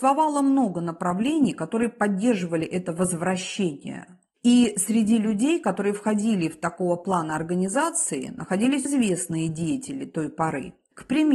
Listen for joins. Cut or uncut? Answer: cut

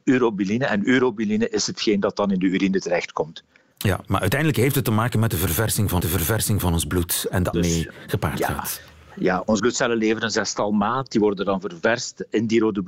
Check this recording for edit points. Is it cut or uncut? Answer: cut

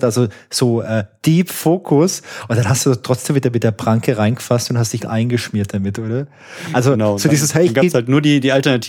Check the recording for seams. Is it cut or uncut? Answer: cut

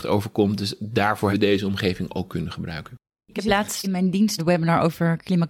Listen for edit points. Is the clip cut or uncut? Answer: cut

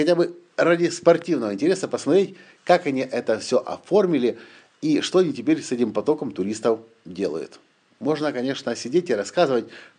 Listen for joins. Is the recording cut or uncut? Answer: uncut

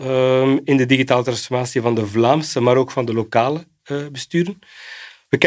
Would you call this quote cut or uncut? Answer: uncut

